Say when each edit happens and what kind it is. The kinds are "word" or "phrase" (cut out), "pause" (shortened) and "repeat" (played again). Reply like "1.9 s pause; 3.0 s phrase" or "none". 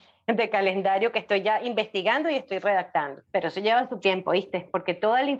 3.3 s pause